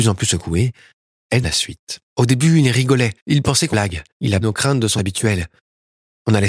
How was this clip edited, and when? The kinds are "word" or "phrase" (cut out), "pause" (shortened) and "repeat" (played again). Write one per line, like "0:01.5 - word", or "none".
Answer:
0:01.4 - word
0:02.1 - pause
0:03.2 - pause
0:03.7 - phrase
0:04.1 - pause
0:04.4 - word
0:05.0 - word